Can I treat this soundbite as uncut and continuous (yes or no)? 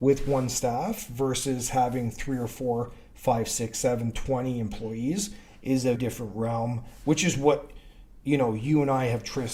no